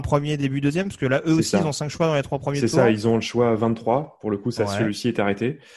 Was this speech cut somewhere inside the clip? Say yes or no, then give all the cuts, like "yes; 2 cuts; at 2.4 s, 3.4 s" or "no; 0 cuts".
no; 0 cuts